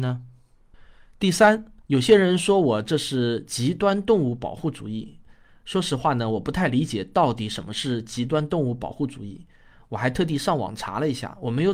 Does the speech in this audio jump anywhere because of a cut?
yes; 1 cut; at 1.8 s

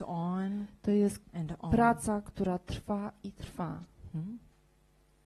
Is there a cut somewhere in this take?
yes; 1 cut; at 1.2 s

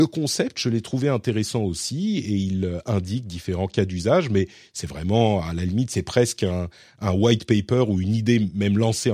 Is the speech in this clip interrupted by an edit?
no; 0 cuts

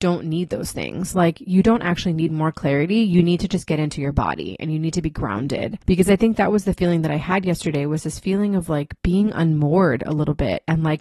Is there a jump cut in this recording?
yes; 2 cuts; at 5.8 s, 9.0 s

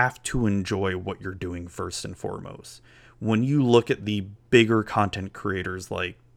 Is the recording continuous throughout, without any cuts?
yes; 0 cuts

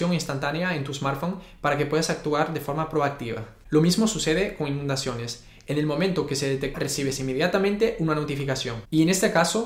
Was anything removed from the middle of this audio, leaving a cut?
yes; 1 cut; at 6.7 s

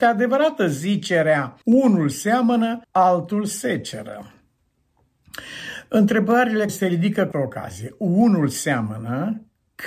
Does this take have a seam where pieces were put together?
yes; 4 cuts; at 1.6 s, 2.8 s, 6.7 s, 7.3 s

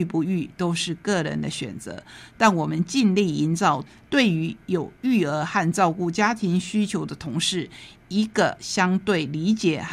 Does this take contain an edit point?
no; 0 cuts

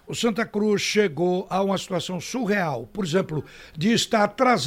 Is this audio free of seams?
yes; 0 cuts

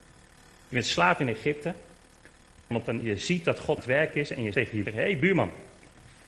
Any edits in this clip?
yes; 5 cuts; at 2.7 s, 3.0 s, 3.8 s, 4.5 s, 4.8 s

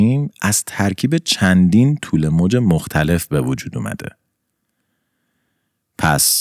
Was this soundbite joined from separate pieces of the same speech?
no; 0 cuts

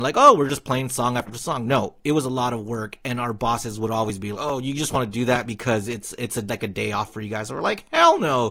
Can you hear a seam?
yes; 2 cuts; at 1.3 s, 4.3 s

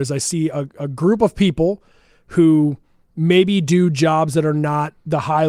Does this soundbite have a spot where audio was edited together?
no; 0 cuts

